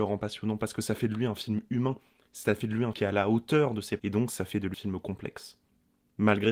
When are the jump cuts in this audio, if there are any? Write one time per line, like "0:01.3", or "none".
0:02.9
0:04.0
0:04.7